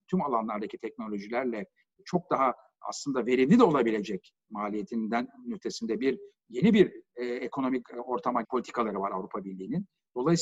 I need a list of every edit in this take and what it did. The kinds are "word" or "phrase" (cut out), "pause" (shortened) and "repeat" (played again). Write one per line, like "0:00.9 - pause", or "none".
0:08.4 - word